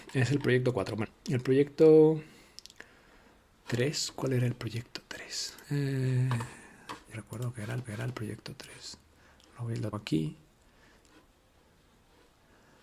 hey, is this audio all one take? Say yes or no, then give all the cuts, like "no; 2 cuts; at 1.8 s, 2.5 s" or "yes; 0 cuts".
no; 5 cuts; at 1.0 s, 5.6 s, 7.1 s, 7.8 s, 9.9 s